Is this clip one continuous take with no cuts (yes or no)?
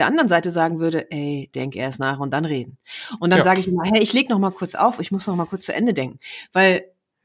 yes